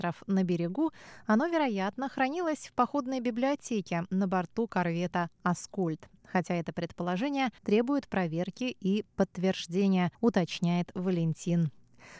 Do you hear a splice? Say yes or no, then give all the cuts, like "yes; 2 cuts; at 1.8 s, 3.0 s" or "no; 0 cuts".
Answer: yes; 2 cuts; at 7.6 s, 10.1 s